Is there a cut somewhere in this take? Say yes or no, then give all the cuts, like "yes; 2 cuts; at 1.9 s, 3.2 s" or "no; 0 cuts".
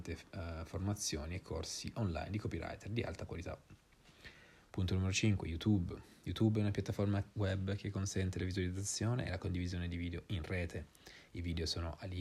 no; 0 cuts